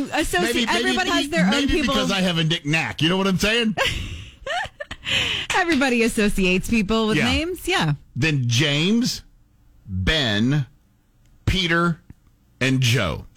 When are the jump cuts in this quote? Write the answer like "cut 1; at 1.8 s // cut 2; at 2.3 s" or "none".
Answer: cut 1; at 1.1 s